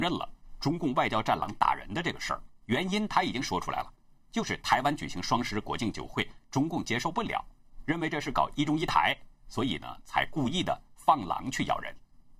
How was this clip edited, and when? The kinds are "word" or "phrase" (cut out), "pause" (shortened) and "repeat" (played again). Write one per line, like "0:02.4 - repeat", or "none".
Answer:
0:02.6 - pause